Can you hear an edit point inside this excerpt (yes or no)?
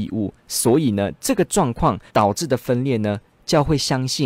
yes